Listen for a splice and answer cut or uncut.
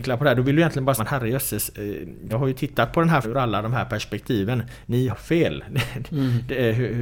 cut